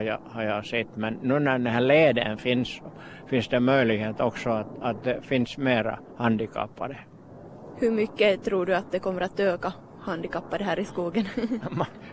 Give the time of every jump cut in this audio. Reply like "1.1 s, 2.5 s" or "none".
none